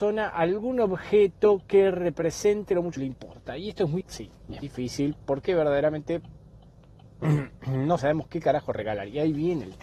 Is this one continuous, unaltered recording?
no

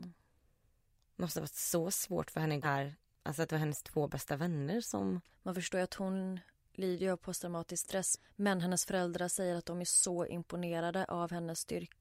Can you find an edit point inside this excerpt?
yes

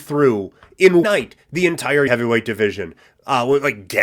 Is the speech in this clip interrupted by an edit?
yes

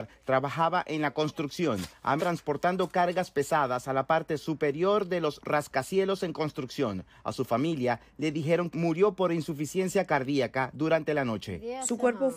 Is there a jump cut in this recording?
yes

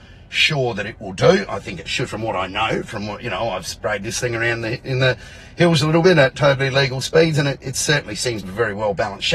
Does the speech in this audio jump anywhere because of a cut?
yes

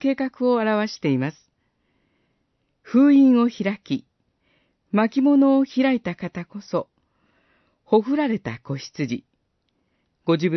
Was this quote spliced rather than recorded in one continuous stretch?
no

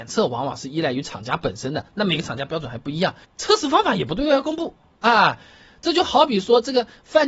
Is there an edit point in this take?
yes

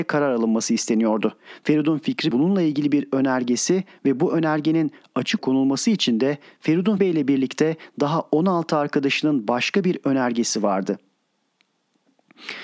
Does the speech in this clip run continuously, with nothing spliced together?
no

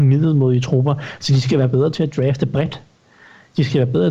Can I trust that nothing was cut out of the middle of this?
yes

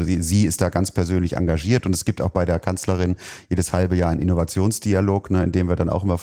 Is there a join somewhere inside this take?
no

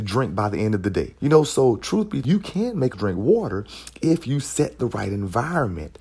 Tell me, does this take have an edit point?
yes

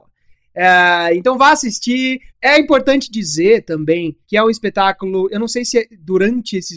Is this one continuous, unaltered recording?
no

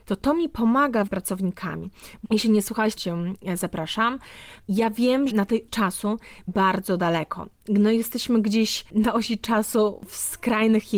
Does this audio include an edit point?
yes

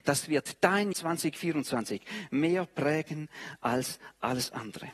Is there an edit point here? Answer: yes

